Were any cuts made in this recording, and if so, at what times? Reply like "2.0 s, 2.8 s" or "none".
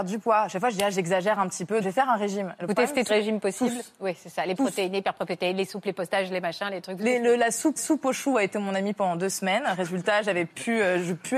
1.8 s, 3.1 s, 7.8 s